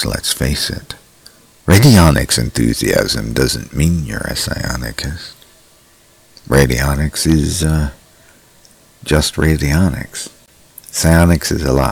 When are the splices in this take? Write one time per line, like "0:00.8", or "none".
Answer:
none